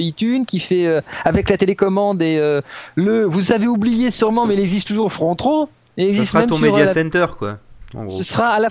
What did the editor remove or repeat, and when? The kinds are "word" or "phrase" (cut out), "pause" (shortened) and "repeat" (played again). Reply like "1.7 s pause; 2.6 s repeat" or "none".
none